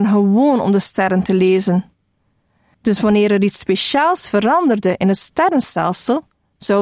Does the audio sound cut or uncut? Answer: uncut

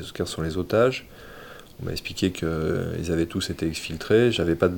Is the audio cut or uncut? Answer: uncut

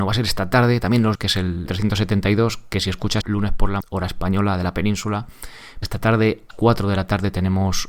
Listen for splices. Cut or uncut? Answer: cut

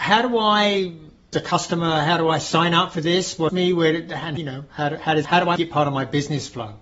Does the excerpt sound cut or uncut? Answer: cut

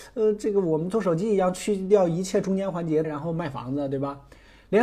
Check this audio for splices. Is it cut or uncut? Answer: cut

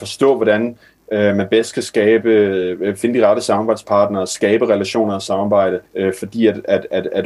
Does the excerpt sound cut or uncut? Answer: cut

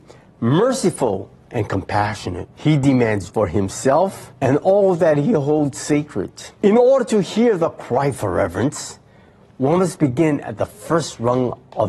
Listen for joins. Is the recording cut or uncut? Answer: cut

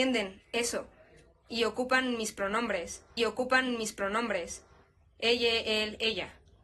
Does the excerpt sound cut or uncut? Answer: cut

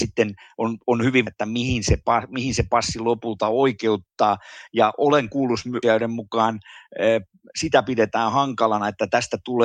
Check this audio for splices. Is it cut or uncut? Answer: cut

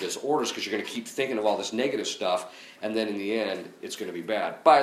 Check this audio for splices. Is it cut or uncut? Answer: uncut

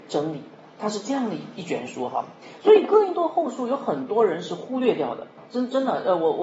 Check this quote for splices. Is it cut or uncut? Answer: cut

